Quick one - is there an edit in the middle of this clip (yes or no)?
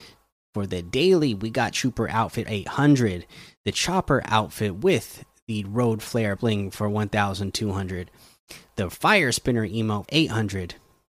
yes